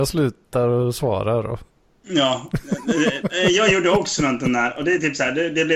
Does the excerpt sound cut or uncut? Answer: cut